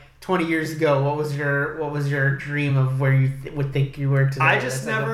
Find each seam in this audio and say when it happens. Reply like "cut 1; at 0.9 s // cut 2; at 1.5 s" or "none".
none